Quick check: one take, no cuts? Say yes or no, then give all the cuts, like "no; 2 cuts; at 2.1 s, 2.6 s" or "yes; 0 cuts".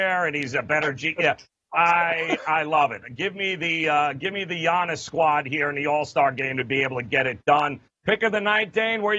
yes; 0 cuts